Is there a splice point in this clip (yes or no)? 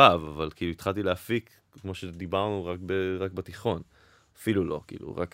no